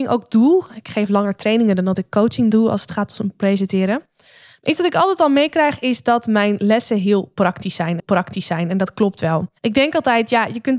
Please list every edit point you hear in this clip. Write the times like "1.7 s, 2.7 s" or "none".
8.0 s, 9.6 s

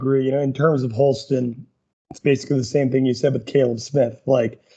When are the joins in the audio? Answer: 1.9 s

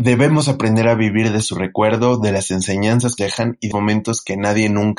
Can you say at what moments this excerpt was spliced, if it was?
3.2 s, 3.7 s

